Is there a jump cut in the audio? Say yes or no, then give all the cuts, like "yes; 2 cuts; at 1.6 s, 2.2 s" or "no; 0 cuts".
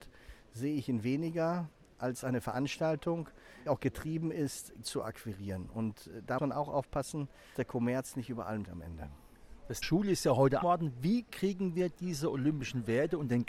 yes; 7 cuts; at 3.7 s, 4.8 s, 6.4 s, 7.5 s, 8.6 s, 9.8 s, 10.6 s